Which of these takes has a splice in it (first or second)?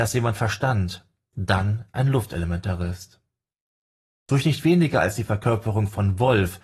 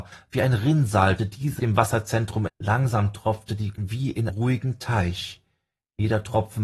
second